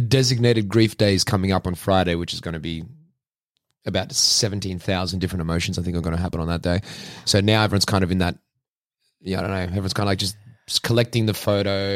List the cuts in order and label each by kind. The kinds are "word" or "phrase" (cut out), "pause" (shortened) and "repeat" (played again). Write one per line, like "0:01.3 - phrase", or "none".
none